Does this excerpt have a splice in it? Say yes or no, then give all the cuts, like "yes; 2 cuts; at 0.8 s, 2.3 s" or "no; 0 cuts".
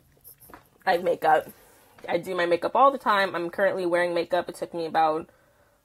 yes; 1 cut; at 1.0 s